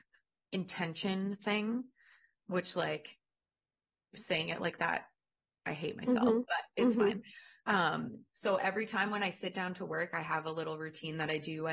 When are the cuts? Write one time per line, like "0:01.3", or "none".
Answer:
none